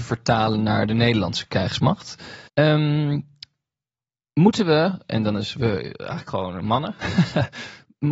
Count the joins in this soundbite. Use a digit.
1